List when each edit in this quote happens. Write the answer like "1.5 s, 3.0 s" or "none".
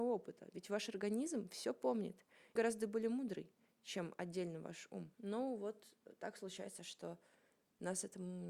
2.6 s, 5.1 s